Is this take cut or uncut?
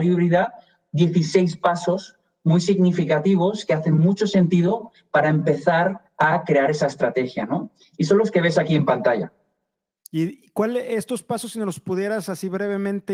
cut